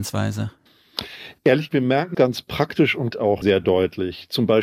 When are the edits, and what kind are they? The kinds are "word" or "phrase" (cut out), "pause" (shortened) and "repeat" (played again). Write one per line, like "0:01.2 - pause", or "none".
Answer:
0:01.7 - word
0:02.1 - word
0:03.1 - word
0:03.4 - word